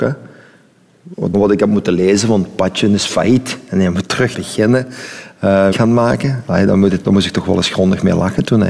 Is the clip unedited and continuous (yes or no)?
no